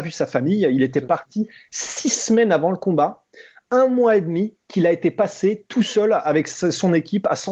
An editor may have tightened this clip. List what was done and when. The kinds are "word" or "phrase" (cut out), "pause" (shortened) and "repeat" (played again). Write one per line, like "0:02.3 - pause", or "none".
none